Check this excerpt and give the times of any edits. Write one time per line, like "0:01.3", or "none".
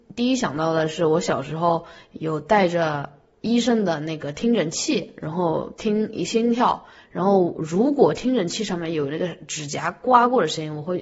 none

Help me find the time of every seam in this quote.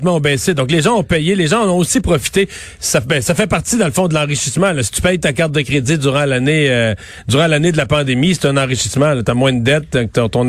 none

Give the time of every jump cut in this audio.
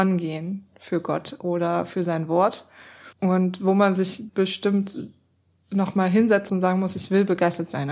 0:03.1
0:04.3
0:06.5

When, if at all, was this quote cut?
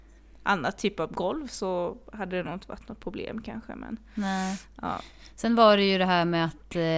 none

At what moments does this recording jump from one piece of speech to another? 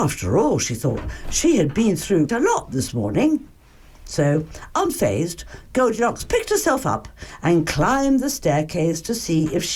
0:02.3

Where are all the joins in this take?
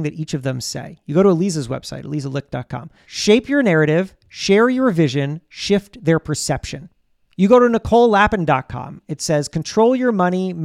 none

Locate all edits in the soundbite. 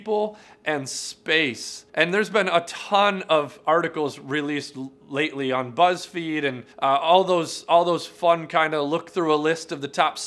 0:01.9
0:06.7

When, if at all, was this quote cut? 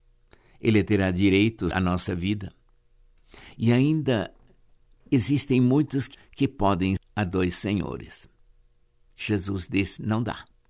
0:01.7
0:05.0
0:06.1
0:07.0

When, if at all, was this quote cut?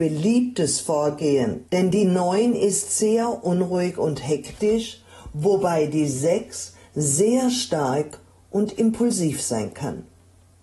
0:01.7

